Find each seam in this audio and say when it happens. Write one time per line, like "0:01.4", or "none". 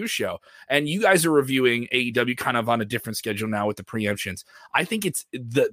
none

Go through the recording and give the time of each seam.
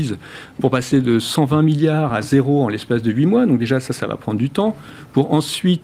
none

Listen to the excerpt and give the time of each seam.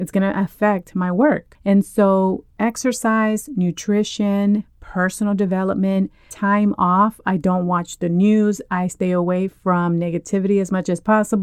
none

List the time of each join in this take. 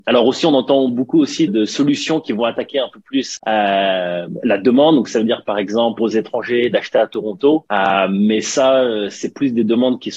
0:01.5
0:03.4
0:06.0

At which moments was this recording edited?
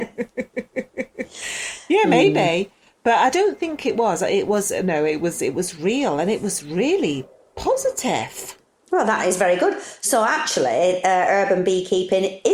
none

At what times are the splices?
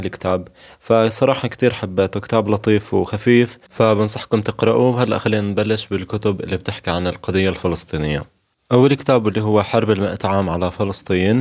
none

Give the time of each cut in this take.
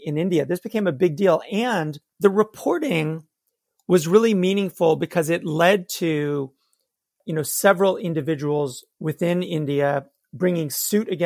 0:02.1

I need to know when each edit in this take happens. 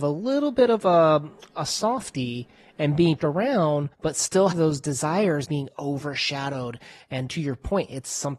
0:03.2
0:03.9
0:04.5
0:05.4
0:07.3

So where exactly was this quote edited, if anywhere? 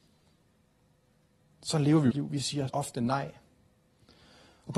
0:02.1
0:02.7

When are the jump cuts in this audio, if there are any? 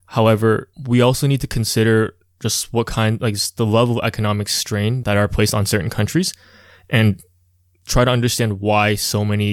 none

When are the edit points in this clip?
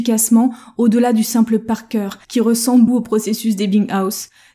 0:02.2
0:02.9

